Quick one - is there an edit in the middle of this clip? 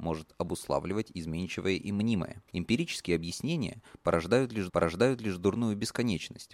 yes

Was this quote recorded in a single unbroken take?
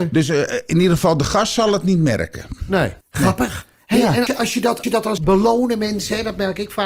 no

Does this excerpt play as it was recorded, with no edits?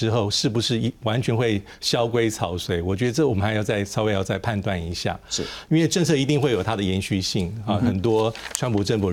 yes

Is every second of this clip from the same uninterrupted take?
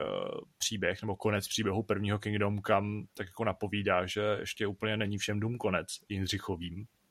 yes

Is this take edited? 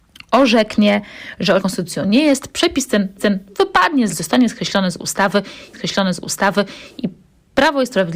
yes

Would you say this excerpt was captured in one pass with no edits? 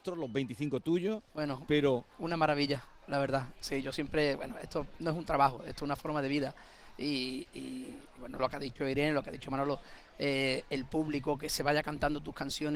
no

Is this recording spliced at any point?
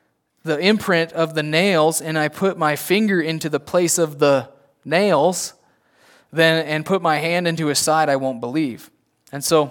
no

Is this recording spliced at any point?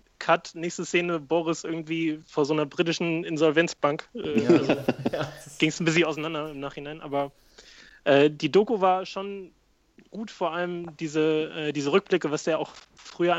no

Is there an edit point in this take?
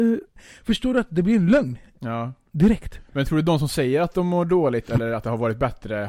no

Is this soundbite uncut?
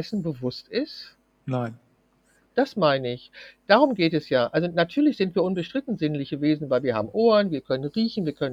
yes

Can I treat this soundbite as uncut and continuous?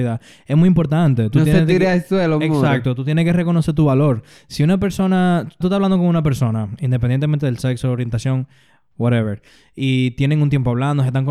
no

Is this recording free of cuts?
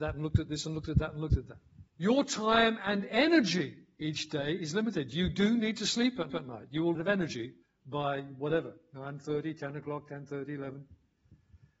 no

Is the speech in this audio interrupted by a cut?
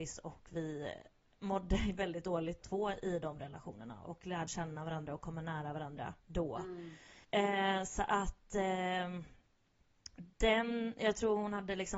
yes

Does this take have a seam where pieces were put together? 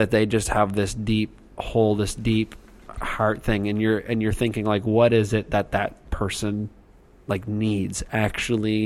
no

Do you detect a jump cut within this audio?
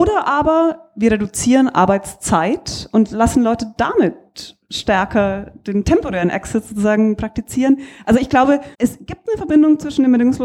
yes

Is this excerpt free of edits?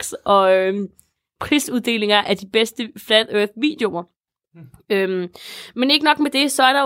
yes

